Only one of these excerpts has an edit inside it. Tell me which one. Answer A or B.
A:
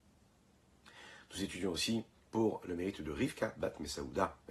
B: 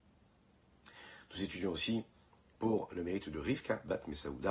A